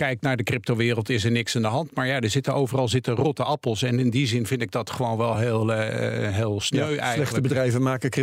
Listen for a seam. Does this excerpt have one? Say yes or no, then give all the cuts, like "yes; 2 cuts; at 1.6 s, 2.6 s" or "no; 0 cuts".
no; 0 cuts